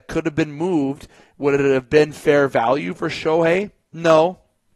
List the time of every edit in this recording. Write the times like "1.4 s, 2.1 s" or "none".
none